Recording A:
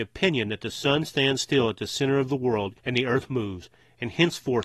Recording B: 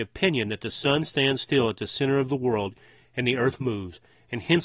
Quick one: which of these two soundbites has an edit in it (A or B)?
A